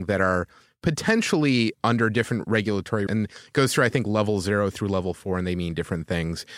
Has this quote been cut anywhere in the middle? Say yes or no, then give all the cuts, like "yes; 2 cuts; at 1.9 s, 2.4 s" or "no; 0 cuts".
yes; 2 cuts; at 1.7 s, 3.1 s